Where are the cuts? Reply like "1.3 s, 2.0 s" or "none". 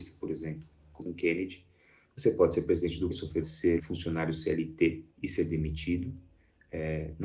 1.0 s, 3.1 s, 3.4 s, 3.8 s, 5.1 s

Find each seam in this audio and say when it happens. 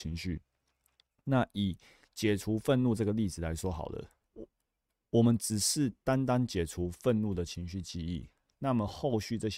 4.2 s

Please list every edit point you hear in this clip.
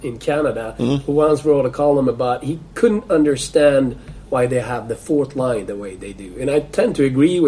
none

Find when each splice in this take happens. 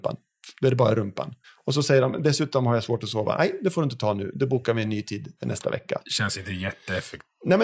1.4 s, 5.4 s

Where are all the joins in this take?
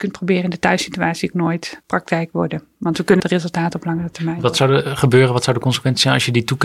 1.3 s, 3.2 s

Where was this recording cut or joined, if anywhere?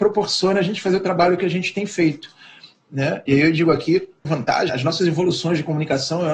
4.2 s, 4.7 s

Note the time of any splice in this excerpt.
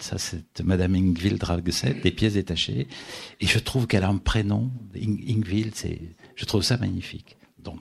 none

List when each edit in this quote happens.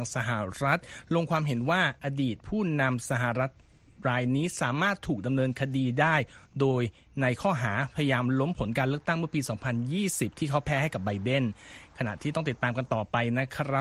none

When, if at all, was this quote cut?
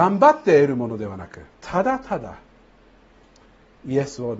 1.5 s

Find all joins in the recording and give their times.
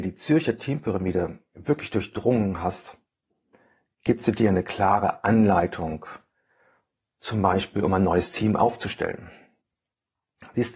none

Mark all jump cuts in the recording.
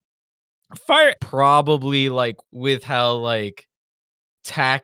1.2 s, 2.4 s

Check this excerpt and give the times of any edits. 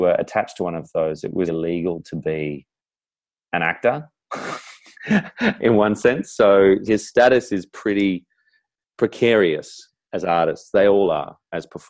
1.5 s, 6.9 s

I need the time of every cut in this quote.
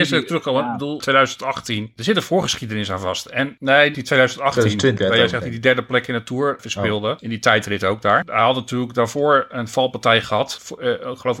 1.0 s, 3.6 s, 3.9 s, 5.0 s, 6.6 s

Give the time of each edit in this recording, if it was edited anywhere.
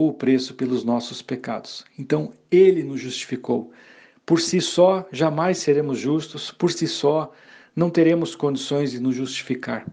none

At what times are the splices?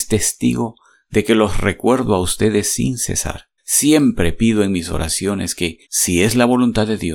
3.6 s, 5.8 s

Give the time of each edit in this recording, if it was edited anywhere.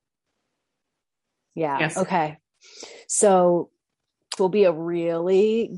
4.4 s

